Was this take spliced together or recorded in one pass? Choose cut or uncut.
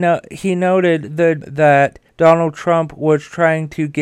cut